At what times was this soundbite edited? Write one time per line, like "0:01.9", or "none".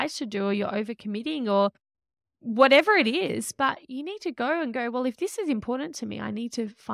none